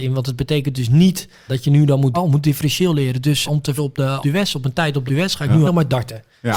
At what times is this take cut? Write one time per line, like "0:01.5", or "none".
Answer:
0:01.5
0:02.1
0:03.4
0:03.8
0:04.2
0:05.1
0:05.6